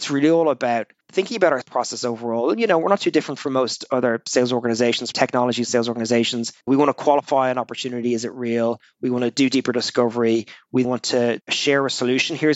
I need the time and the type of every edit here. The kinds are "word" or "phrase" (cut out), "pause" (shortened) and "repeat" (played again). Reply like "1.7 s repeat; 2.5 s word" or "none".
1.0 s pause; 1.6 s word; 5.1 s word; 6.6 s pause; 10.8 s word